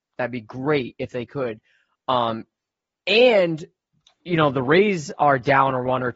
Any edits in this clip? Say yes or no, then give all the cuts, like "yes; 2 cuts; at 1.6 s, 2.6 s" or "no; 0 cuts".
no; 0 cuts